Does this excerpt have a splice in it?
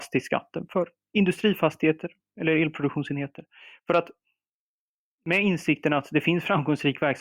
no; 0 cuts

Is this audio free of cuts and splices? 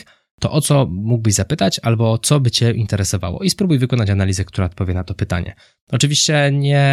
yes; 0 cuts

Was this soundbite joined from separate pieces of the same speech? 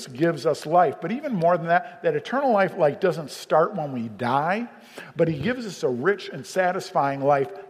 no; 0 cuts

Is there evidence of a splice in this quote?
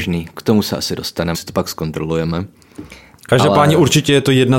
yes; 1 cut; at 1.3 s

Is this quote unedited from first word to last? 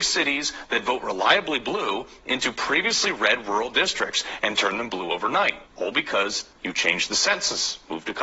no; 2 cuts; at 5.7 s, 6.5 s

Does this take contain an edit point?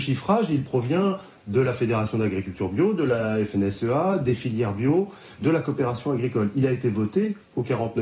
no; 0 cuts

